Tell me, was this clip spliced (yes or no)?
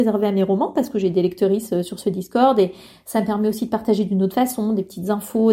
no